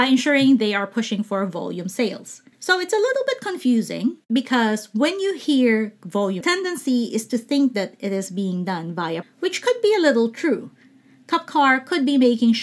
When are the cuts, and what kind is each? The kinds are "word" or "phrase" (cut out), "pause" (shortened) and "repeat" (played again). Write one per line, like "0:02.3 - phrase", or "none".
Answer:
0:02.5 - pause
0:06.4 - phrase
0:09.2 - word